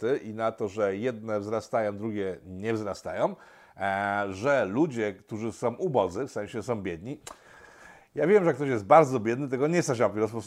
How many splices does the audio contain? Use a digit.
0